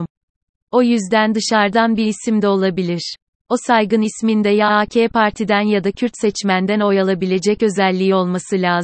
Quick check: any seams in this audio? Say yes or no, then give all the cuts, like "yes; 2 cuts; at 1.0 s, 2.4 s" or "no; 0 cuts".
no; 0 cuts